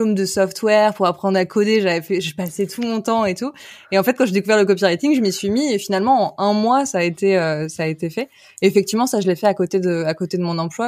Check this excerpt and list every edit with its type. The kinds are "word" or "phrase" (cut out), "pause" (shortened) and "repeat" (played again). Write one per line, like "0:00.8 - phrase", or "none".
none